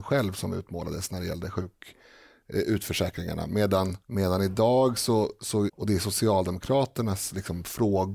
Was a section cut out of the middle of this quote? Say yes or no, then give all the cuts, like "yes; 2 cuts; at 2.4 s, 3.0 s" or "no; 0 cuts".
yes; 2 cuts; at 4.0 s, 5.7 s